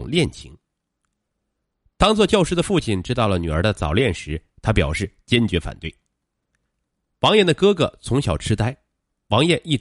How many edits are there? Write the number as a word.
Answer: zero